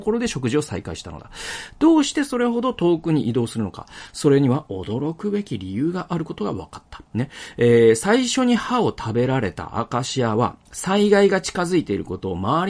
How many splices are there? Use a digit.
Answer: 2